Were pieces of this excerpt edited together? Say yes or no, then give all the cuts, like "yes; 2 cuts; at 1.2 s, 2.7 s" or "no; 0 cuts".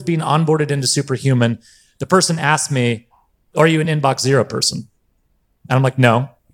no; 0 cuts